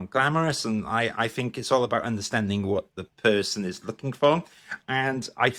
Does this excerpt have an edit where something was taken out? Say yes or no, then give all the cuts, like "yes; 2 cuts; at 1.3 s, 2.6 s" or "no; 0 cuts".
no; 0 cuts